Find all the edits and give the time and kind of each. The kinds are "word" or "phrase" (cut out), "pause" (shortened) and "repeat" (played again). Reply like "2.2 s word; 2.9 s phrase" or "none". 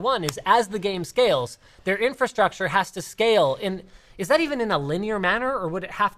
none